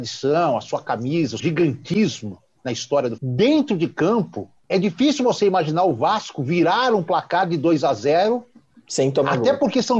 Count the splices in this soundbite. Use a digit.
3